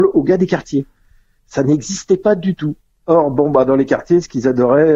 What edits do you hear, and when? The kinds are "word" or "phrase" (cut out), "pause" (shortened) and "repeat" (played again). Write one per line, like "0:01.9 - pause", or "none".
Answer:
none